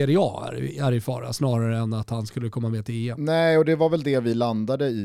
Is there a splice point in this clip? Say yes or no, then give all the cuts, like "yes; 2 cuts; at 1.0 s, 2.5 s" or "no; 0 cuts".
no; 0 cuts